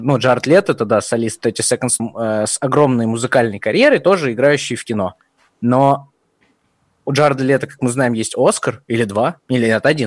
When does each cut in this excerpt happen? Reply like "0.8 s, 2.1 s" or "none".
2.0 s